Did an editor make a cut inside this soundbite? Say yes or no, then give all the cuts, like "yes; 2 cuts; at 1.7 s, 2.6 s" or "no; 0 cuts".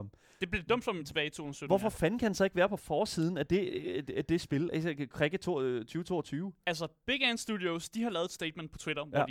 no; 0 cuts